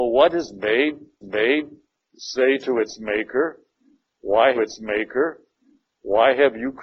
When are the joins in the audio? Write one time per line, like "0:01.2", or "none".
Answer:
0:01.2
0:04.5

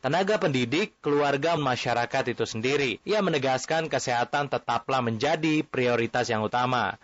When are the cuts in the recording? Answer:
0:01.6

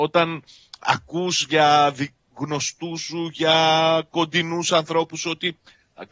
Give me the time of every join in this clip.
none

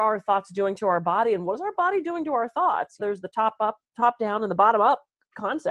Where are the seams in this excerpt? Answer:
0:03.0

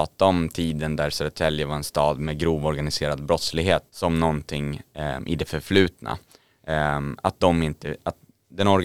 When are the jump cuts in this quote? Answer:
0:03.9

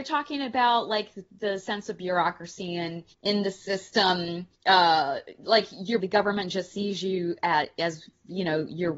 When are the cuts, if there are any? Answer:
0:03.1
0:04.6
0:06.0

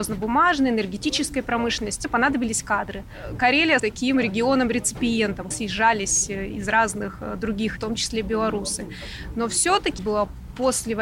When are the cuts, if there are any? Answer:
0:02.0
0:03.8
0:05.5
0:07.8
0:10.0

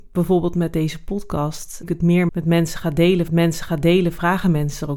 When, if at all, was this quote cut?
0:01.8
0:02.3
0:03.3

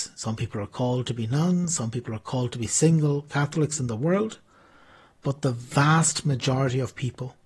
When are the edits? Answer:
none

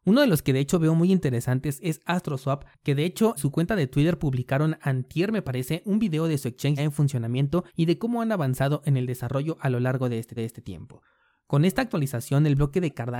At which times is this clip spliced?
0:02.7
0:03.4
0:06.8
0:07.7
0:10.4

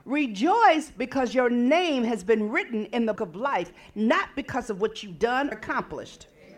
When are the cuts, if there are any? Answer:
0:03.2
0:05.5

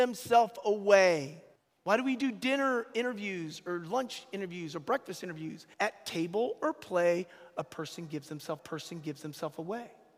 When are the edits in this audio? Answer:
0:01.6
0:05.7
0:08.6

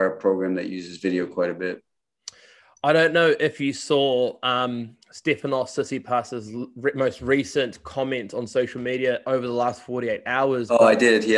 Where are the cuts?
none

